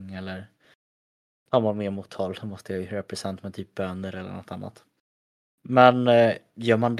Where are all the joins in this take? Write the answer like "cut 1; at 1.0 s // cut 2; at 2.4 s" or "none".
cut 1; at 2.1 s